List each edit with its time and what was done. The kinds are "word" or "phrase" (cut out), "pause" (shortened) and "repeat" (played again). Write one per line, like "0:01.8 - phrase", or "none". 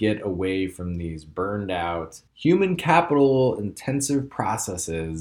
0:02.3 - pause